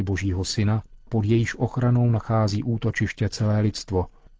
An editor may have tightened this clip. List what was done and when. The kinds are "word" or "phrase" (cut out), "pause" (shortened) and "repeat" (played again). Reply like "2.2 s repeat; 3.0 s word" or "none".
1.1 s word